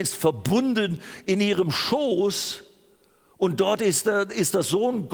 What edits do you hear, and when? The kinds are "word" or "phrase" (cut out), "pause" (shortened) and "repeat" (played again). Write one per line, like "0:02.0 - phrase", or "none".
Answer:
none